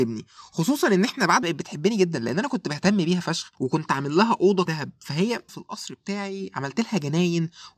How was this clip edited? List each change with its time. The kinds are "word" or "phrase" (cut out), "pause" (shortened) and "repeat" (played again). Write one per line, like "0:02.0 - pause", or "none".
0:01.4 - phrase
0:03.5 - pause
0:04.7 - word
0:05.5 - phrase